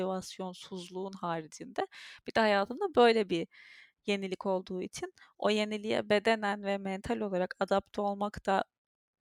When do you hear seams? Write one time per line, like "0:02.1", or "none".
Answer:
none